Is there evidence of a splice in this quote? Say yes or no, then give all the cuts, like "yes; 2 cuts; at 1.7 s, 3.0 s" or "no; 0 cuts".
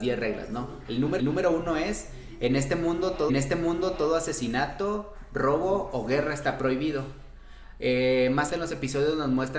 yes; 3 cuts; at 1.2 s, 3.3 s, 8.5 s